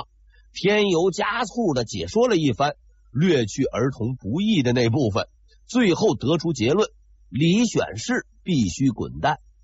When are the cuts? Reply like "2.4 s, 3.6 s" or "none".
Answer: none